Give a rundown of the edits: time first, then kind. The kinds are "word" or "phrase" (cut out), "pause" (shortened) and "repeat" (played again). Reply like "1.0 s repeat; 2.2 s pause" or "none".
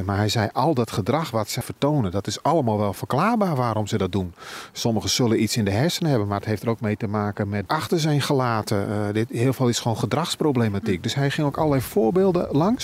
1.6 s word; 7.7 s phrase